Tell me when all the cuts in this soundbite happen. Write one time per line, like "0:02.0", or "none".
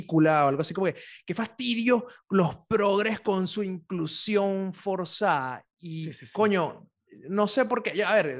none

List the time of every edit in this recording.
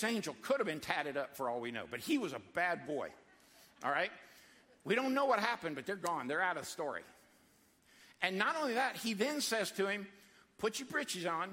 none

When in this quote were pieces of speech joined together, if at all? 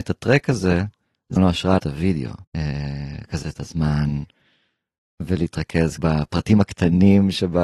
0:01.4
0:01.8
0:02.4
0:03.4
0:06.0

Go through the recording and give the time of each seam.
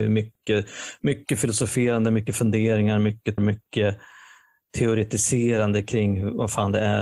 0:03.4

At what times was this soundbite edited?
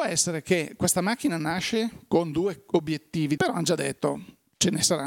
0:03.4

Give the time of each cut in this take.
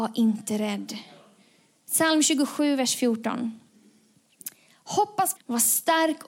0:05.4

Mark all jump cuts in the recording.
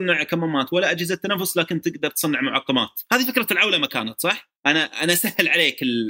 0:03.1
0:04.6

